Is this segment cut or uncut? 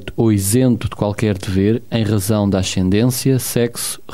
uncut